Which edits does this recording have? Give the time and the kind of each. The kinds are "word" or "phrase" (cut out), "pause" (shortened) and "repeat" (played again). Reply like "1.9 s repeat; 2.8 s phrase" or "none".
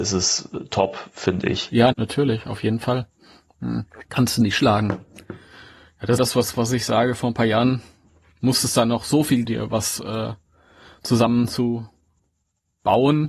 1.9 s word; 4.1 s pause; 6.2 s phrase; 9.4 s phrase

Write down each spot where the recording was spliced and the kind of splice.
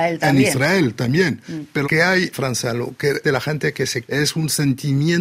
1.8 s word; 2.3 s word; 3.2 s word; 4.0 s phrase

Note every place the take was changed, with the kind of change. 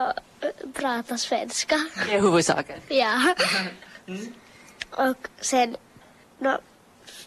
6.2 s pause

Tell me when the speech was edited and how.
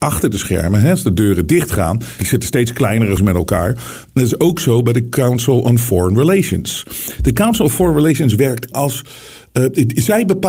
2.2 s word; 3.2 s word; 8.7 s word

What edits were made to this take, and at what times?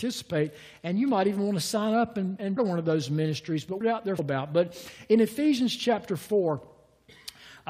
2.6 s phrase; 3.8 s phrase; 4.2 s phrase

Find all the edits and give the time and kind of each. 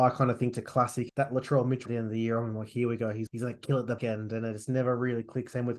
1.1 s word; 1.9 s word; 3.3 s word; 4.0 s word

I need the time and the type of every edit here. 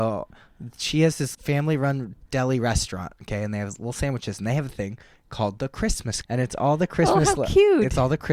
1.3 s word; 6.2 s word

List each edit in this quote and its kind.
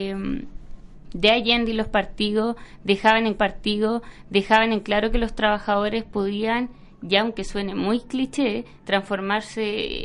3.4 s repeat

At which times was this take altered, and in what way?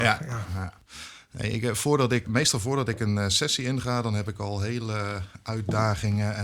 2.2 s word

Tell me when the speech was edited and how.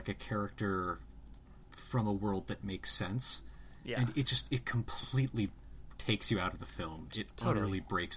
none

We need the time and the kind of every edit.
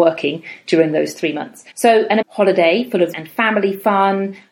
1.7 s pause; 2.2 s word; 3.1 s word

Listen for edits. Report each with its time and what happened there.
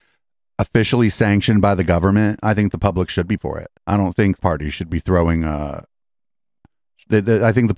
3.4 s word; 3.8 s pause; 4.4 s phrase

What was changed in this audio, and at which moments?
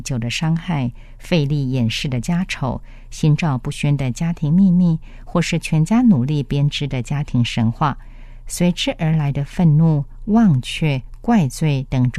10.2 s phrase

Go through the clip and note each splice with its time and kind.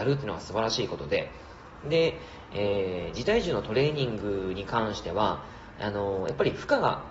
none

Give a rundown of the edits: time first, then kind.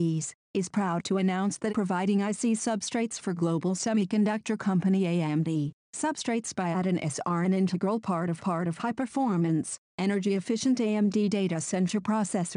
1.7 s phrase; 8.4 s repeat

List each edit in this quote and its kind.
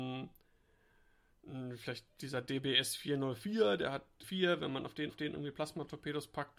4.2 s word; 5.1 s repeat

